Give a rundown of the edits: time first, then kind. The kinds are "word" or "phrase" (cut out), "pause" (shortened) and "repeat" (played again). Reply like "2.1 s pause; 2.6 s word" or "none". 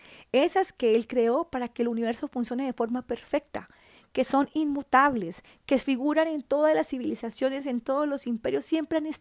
none